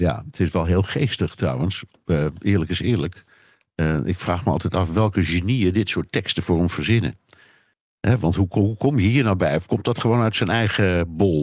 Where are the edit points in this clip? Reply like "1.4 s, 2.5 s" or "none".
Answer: none